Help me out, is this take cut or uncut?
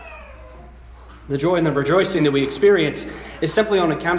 uncut